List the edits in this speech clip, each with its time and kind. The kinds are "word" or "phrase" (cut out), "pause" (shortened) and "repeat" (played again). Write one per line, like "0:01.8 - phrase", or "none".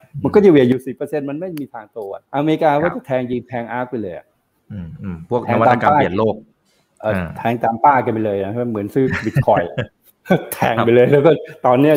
0:02.2 - pause